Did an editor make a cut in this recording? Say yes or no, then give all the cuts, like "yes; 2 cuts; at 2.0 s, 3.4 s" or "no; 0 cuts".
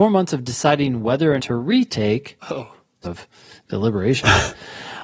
yes; 3 cuts; at 1.4 s, 2.4 s, 3.0 s